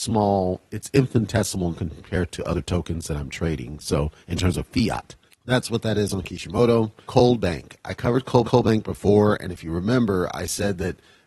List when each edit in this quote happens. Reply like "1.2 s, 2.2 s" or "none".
1.7 s, 5.3 s, 7.1 s, 8.4 s